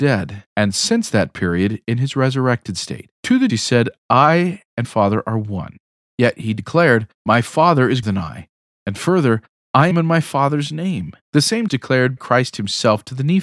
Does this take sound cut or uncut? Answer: cut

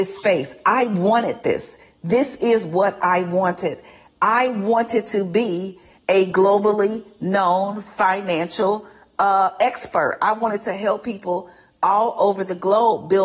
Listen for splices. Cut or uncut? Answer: uncut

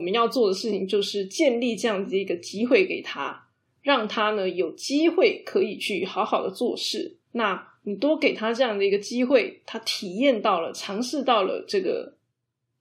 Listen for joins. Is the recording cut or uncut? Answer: cut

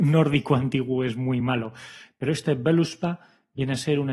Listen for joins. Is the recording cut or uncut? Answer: uncut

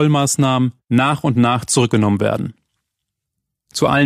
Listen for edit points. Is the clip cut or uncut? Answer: uncut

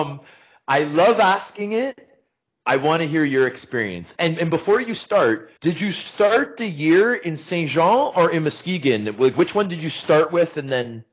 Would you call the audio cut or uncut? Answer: cut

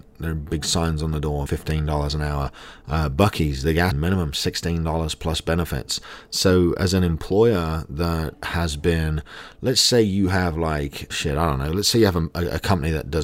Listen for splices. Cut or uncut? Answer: cut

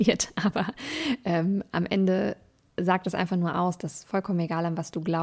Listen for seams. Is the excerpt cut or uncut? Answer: uncut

